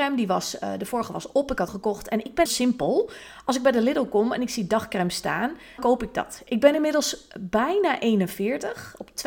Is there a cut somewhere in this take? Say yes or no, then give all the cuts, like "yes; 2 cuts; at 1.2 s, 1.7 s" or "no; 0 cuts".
yes; 3 cuts; at 1.7 s, 2.5 s, 5.8 s